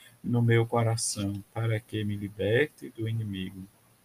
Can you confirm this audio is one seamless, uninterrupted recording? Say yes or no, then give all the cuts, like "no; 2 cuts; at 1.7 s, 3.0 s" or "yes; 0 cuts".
yes; 0 cuts